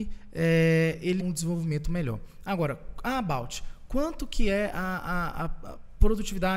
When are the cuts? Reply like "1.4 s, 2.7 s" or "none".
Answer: 1.2 s